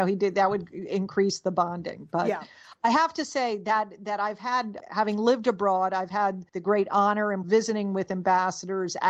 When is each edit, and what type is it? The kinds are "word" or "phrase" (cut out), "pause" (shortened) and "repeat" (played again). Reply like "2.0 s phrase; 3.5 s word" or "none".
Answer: 4.8 s word; 6.5 s pause; 7.4 s phrase